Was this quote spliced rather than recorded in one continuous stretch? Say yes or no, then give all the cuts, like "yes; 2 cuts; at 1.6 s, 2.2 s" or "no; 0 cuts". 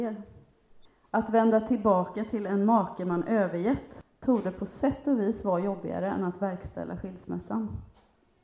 no; 0 cuts